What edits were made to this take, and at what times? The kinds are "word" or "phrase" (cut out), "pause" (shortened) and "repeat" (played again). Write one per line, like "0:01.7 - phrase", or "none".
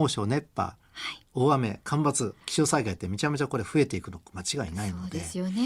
0:02.4 - pause